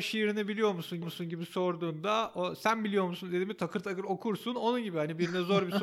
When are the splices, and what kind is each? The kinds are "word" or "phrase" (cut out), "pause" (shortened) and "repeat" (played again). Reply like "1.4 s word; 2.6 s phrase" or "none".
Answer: 1.0 s repeat